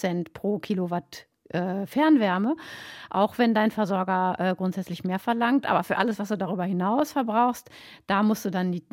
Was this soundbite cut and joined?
no; 0 cuts

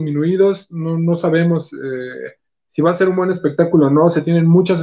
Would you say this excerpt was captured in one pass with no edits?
yes; 0 cuts

